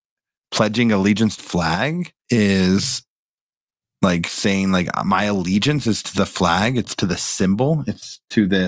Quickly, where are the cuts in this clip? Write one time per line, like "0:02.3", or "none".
0:01.4
0:02.2